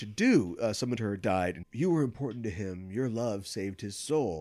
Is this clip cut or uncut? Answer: cut